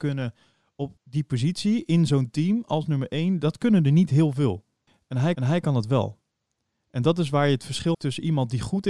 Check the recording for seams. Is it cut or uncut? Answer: cut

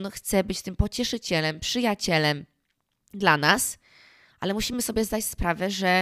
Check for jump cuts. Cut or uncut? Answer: uncut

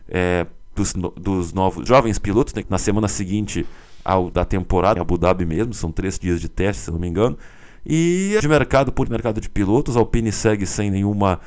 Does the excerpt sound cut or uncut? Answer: cut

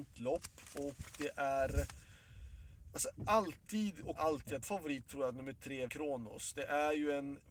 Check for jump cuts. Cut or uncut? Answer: cut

